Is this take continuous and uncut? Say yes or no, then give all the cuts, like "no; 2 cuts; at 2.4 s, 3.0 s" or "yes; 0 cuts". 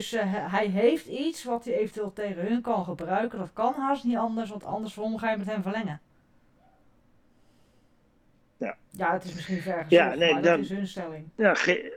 no; 1 cut; at 8.9 s